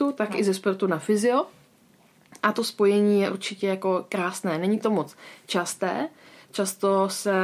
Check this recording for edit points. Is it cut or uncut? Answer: uncut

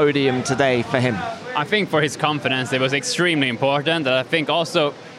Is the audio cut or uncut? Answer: uncut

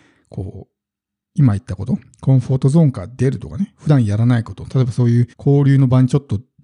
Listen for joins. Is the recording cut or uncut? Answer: cut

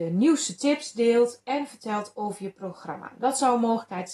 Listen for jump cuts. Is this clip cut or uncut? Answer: uncut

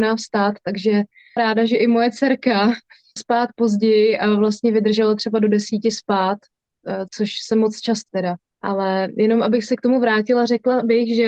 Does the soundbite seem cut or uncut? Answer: cut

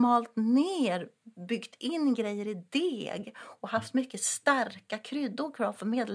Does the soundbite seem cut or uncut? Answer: cut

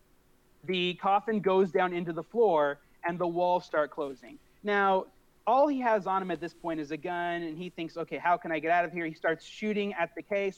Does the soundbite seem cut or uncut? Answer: uncut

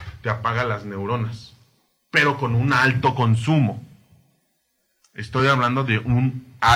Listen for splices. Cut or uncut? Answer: uncut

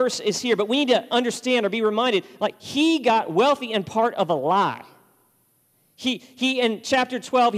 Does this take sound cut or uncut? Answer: uncut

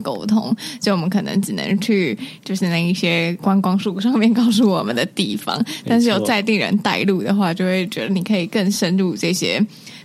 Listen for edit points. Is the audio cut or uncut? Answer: uncut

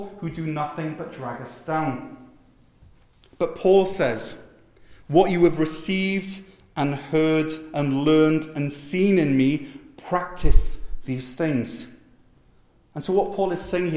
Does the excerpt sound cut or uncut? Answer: uncut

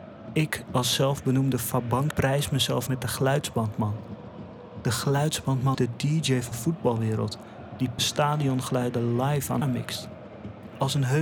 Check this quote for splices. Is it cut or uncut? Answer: cut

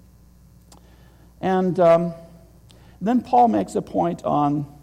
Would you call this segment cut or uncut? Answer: uncut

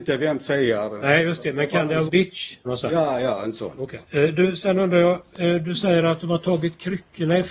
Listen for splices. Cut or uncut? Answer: cut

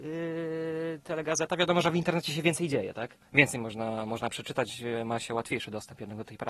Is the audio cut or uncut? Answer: cut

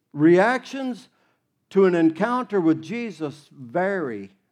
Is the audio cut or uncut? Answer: uncut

